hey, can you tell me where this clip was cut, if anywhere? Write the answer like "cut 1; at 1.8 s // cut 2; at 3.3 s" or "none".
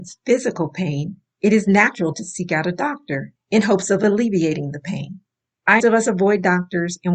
cut 1; at 5.8 s